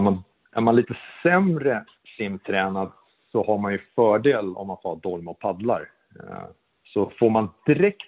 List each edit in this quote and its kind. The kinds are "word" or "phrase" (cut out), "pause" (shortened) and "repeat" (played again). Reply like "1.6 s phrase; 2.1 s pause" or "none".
none